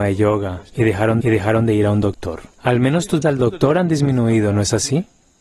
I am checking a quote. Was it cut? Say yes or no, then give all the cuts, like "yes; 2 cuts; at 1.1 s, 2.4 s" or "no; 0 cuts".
yes; 3 cuts; at 1.2 s, 2.5 s, 3.2 s